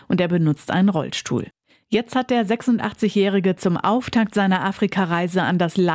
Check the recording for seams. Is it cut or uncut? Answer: uncut